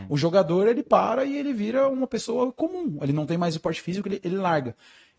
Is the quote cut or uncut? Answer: uncut